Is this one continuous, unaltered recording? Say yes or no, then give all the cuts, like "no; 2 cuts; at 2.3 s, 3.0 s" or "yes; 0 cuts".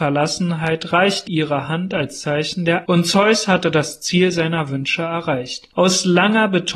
no; 2 cuts; at 1.3 s, 2.8 s